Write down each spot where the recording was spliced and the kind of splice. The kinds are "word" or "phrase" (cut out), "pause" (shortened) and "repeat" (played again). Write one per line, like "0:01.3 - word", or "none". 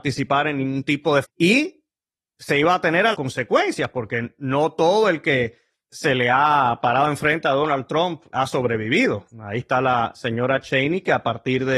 0:01.2 - word
0:03.1 - word
0:09.3 - pause